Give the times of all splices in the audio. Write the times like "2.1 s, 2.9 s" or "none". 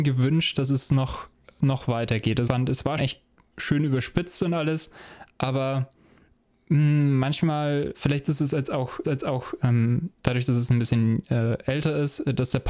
2.5 s, 3.0 s, 9.0 s